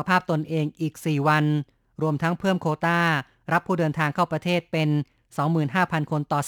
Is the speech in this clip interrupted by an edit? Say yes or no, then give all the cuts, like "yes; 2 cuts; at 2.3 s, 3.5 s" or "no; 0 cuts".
no; 0 cuts